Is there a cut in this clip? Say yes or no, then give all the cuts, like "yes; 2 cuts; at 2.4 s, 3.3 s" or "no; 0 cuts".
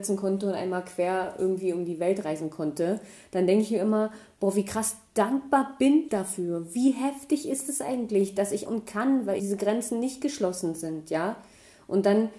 yes; 3 cuts; at 6.1 s, 8.7 s, 9.4 s